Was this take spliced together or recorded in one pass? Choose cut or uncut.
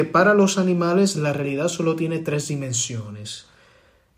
uncut